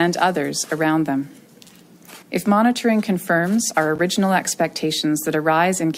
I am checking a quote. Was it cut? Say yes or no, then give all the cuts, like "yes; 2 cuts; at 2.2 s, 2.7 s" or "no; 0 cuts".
yes; 1 cut; at 2.2 s